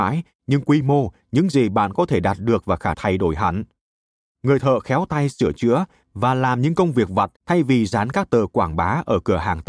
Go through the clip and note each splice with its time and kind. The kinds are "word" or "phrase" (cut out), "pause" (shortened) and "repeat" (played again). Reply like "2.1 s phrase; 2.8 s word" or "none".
2.9 s phrase; 7.4 s pause